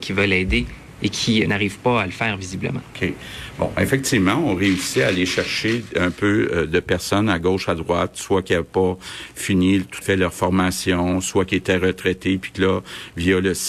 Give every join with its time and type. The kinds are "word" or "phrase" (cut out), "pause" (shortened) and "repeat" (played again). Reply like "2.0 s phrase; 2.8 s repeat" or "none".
1.5 s word; 10.0 s word